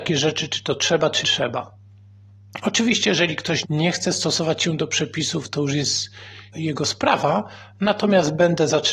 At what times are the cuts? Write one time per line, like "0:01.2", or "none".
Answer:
0:01.2
0:03.6
0:06.5